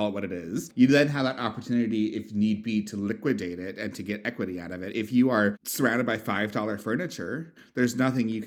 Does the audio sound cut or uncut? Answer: uncut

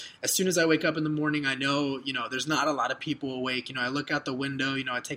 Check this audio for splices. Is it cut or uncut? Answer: uncut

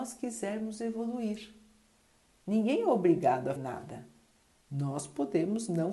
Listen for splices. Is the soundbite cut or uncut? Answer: cut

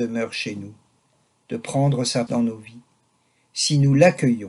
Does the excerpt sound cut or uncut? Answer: cut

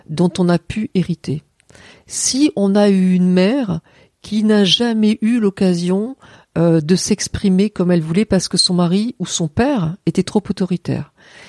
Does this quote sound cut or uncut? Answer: uncut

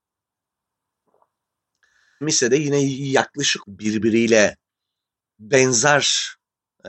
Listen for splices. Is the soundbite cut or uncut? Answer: cut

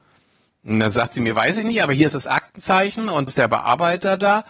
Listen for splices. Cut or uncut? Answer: cut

